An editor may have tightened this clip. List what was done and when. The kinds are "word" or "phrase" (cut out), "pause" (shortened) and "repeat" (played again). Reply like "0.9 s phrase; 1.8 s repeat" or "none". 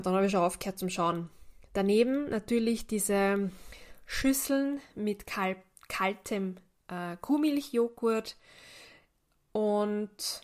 none